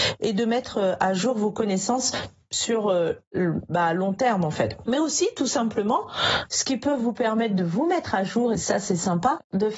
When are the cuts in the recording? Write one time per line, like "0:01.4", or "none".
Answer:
0:08.5